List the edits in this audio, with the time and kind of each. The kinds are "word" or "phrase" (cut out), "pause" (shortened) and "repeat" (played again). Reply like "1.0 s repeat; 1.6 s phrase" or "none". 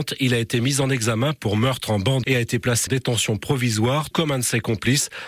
2.2 s word; 2.9 s word; 4.1 s word